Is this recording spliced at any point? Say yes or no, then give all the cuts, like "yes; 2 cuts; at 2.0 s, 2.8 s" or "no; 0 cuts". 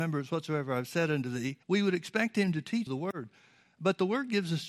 yes; 2 cuts; at 1.6 s, 2.9 s